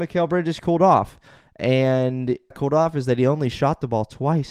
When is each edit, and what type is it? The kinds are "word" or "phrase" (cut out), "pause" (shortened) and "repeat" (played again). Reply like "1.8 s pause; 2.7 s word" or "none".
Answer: 2.5 s phrase